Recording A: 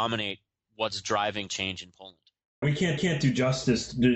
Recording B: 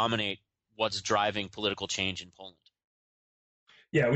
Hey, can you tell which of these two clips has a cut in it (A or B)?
A